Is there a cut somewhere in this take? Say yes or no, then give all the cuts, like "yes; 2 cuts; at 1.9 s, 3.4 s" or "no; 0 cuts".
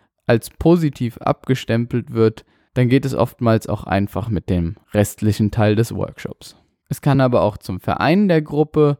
no; 0 cuts